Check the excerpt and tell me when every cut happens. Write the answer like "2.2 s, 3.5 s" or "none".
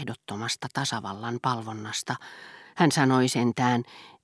none